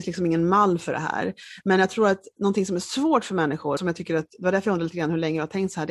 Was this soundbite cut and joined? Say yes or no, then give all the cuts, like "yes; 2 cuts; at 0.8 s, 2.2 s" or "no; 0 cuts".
yes; 1 cut; at 3.8 s